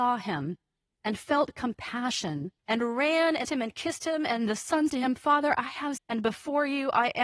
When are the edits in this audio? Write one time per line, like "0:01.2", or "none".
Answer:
0:02.6
0:03.4
0:04.9
0:06.0